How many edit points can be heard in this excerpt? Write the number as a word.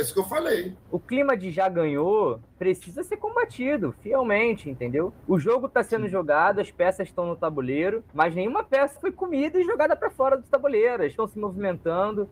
four